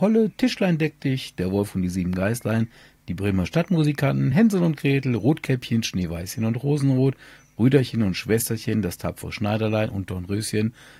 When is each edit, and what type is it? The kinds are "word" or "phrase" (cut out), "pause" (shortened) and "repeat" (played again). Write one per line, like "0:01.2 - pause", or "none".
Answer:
none